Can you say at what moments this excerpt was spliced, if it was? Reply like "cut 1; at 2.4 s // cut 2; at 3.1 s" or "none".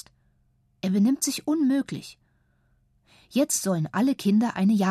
none